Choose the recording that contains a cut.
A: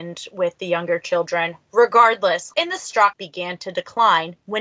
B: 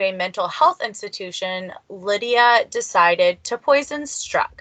A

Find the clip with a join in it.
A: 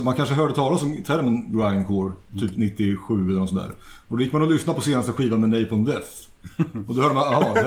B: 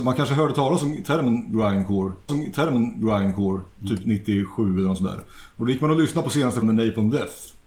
B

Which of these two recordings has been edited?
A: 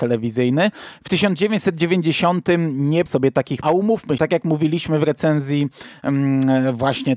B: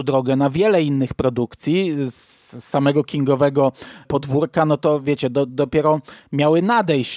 A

